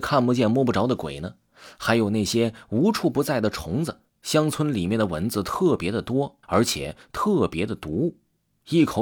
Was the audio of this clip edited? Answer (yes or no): yes